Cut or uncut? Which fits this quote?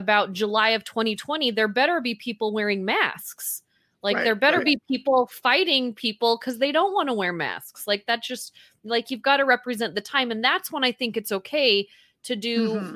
uncut